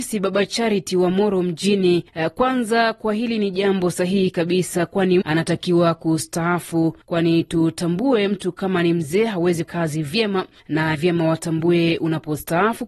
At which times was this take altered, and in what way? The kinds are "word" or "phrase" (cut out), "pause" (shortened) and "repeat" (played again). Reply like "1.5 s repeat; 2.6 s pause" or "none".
5.2 s word; 9.6 s word; 10.9 s word